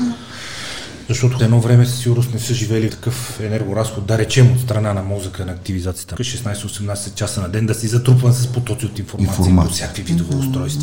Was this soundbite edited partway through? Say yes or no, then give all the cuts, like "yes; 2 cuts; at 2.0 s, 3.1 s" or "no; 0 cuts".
yes; 3 cuts; at 1.4 s, 2.9 s, 6.2 s